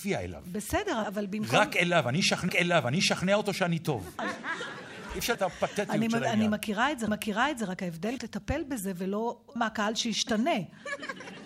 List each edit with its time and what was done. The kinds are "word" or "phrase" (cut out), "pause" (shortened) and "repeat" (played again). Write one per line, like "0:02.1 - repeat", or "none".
0:01.0 - word
0:02.5 - repeat
0:05.3 - word
0:07.1 - repeat
0:08.2 - phrase
0:09.6 - word